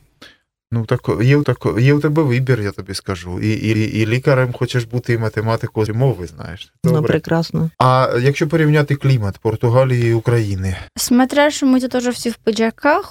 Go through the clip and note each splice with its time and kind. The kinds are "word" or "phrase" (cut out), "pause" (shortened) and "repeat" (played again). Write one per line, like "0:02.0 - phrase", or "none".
0:01.4 - repeat
0:03.7 - repeat
0:05.9 - word
0:06.8 - word
0:07.7 - pause
0:10.9 - pause